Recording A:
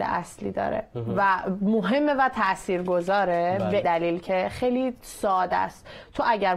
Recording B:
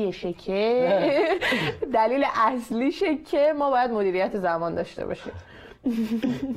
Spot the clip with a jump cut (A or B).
A